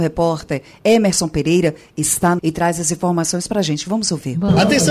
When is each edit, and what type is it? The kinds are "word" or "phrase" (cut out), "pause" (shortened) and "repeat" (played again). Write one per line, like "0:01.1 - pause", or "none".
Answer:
0:02.4 - word

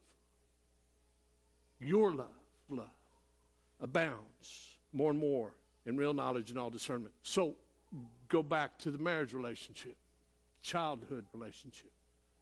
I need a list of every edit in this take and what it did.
0:02.7 - word
0:04.8 - pause
0:05.6 - pause
0:07.2 - pause
0:11.3 - word

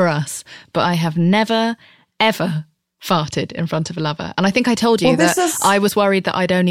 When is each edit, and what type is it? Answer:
none

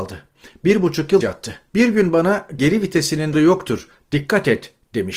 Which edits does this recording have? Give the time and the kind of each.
0:01.2 - word
0:01.7 - pause
0:02.6 - word
0:03.3 - word

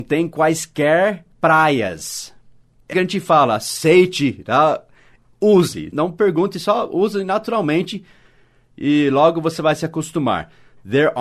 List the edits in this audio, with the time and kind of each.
0:01.3 - pause
0:02.9 - word

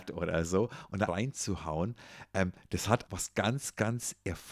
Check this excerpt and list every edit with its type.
0:01.1 - word
0:03.1 - word

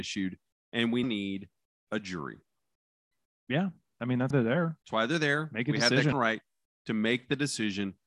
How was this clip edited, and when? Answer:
0:01.0 - word
0:04.3 - word
0:04.8 - pause
0:06.1 - word

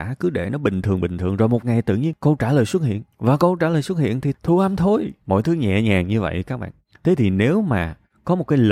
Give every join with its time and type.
0:03.1 - pause
0:05.2 - pause

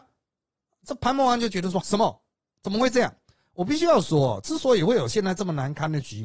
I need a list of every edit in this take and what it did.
0:01.8 - word

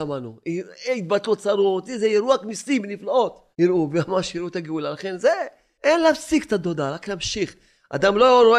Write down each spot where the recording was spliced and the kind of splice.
0:03.5 - pause

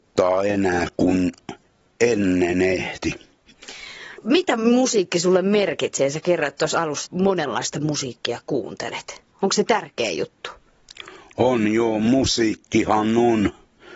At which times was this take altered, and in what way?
0:07.1 - phrase

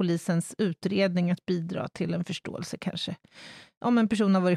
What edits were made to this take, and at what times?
none

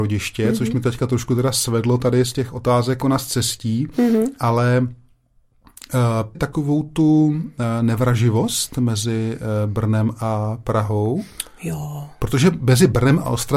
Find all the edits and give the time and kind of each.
0:03.0 - phrase
0:06.3 - phrase

